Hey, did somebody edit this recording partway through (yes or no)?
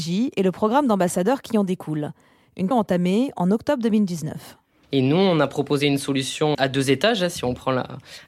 yes